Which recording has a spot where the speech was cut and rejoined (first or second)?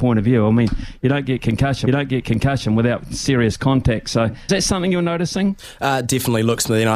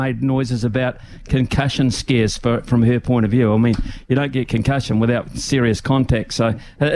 first